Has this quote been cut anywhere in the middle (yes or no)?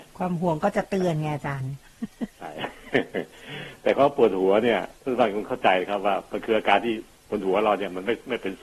yes